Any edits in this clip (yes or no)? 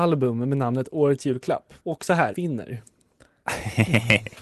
yes